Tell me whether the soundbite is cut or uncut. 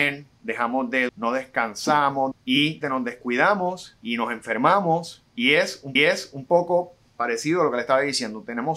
cut